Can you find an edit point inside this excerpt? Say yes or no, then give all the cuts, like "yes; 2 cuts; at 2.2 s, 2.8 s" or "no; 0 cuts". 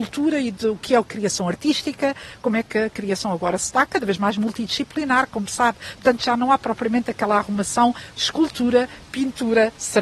no; 0 cuts